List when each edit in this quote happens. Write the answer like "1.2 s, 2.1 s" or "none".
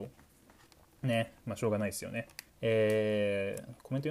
2.5 s